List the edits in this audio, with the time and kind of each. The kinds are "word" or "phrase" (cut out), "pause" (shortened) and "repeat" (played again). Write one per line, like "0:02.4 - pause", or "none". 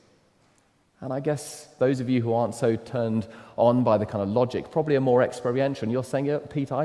none